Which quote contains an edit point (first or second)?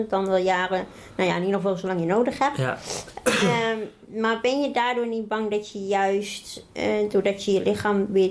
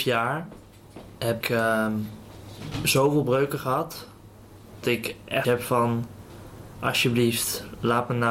second